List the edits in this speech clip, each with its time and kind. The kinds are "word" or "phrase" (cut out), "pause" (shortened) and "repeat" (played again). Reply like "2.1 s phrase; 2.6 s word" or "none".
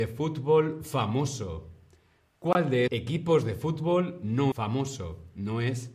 2.9 s word; 4.5 s word